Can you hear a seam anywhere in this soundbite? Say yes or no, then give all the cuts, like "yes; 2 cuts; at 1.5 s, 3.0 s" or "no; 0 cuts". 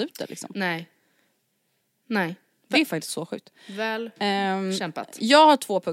no; 0 cuts